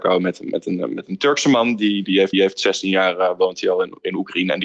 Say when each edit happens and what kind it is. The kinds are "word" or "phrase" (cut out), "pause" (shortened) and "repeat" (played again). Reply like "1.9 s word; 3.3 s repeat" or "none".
2.3 s repeat